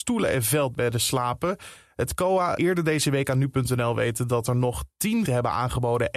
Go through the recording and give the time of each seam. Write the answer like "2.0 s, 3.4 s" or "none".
2.6 s, 5.3 s